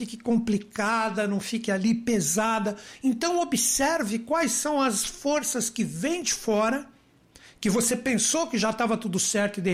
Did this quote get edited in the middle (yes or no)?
no